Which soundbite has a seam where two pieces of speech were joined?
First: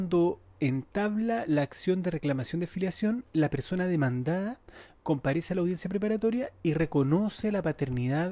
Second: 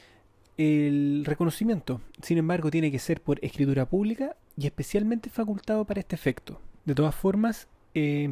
second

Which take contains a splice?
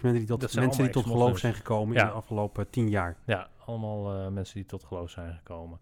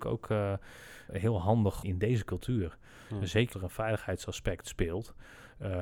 second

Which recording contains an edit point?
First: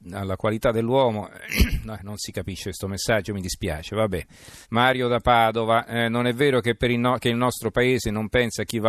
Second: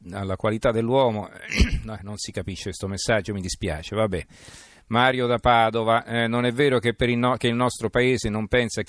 first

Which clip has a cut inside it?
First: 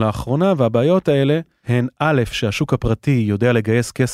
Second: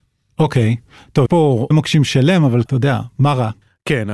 second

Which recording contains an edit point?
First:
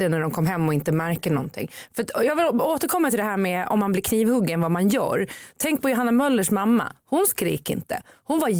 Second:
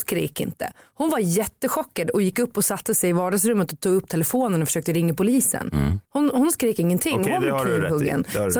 second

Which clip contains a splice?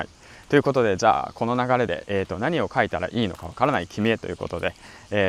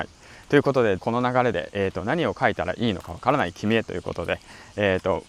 second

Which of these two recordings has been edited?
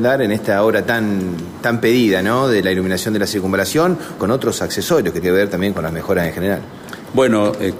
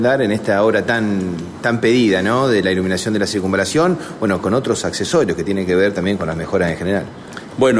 first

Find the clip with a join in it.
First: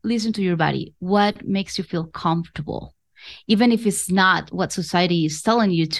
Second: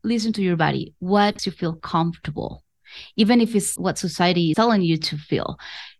second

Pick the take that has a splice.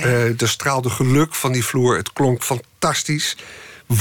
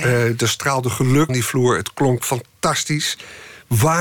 second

